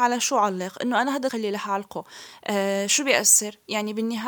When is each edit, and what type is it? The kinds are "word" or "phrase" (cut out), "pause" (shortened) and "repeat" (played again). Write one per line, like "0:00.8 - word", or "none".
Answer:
0:01.3 - word